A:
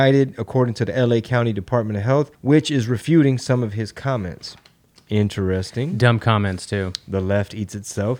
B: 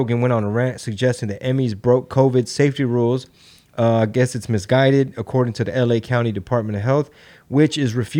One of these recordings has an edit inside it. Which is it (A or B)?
A